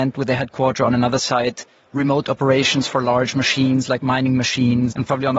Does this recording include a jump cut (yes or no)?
no